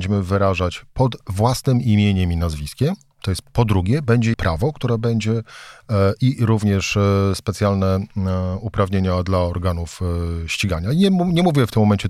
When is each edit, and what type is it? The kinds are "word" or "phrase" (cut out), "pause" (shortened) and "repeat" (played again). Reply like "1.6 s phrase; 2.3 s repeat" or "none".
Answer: 3.4 s phrase; 4.3 s word